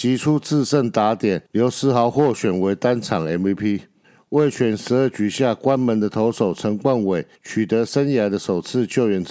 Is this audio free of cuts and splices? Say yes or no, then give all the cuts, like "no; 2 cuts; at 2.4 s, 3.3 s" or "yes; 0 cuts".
no; 3 cuts; at 1.5 s, 4.0 s, 7.3 s